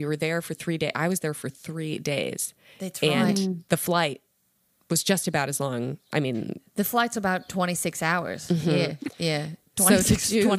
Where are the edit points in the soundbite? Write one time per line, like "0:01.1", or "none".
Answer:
none